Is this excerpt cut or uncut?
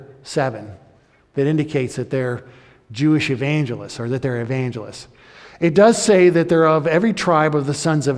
uncut